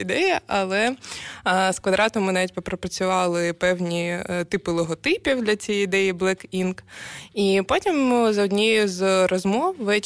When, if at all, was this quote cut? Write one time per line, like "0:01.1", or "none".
none